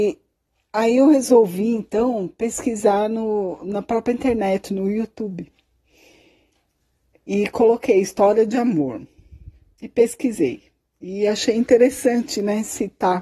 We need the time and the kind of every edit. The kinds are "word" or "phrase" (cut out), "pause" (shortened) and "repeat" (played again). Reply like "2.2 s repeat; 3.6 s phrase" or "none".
none